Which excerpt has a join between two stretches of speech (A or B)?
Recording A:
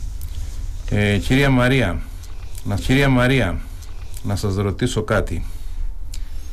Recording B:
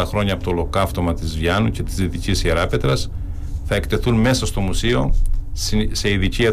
A